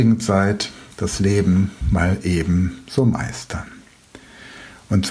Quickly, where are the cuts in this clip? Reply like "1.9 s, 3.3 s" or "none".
0.9 s